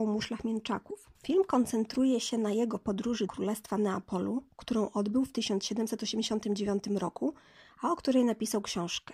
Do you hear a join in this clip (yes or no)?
yes